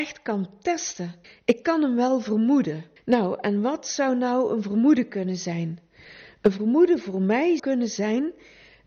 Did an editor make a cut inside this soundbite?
yes; 3 cuts; at 1.2 s, 3.0 s, 7.6 s

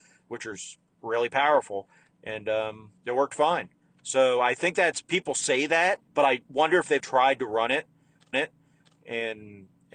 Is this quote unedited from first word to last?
no; 4 cuts; at 3.0 s, 6.1 s, 7.0 s, 8.3 s

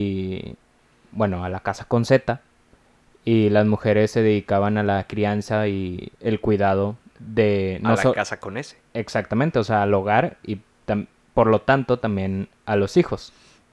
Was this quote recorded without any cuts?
yes; 0 cuts

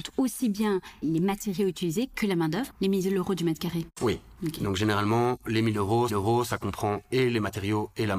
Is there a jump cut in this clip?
yes; 4 cuts; at 1.0 s, 2.7 s, 4.4 s, 6.1 s

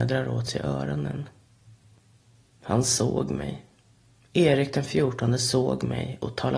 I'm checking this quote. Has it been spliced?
no; 0 cuts

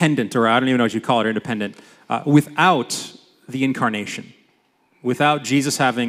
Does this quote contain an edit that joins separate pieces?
no; 0 cuts

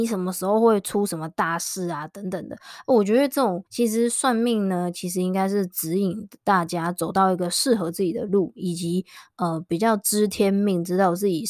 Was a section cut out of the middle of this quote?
yes; 1 cut; at 3.7 s

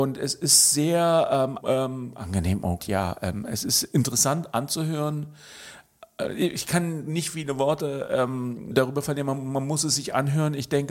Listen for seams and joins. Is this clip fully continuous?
no; 3 cuts; at 1.6 s, 2.8 s, 8.7 s

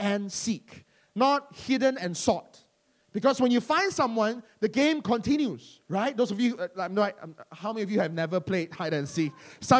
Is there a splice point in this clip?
no; 0 cuts

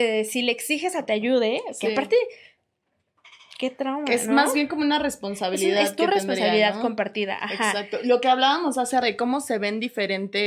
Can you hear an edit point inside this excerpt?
yes; 2 cuts; at 1.1 s, 9.0 s

